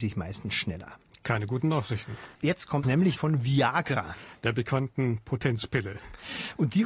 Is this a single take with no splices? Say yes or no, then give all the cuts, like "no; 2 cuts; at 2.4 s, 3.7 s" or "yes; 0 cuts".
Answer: no; 3 cuts; at 2.3 s, 2.8 s, 3.2 s